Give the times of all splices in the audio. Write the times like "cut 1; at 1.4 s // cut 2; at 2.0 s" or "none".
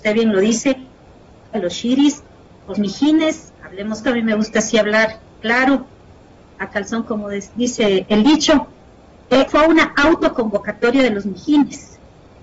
cut 1; at 2.7 s // cut 2; at 4.0 s // cut 3; at 7.0 s // cut 4; at 9.5 s